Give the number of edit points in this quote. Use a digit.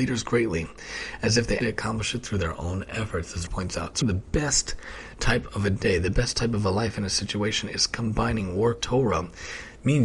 4